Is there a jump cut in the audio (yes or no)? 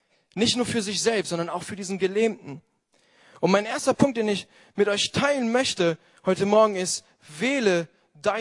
no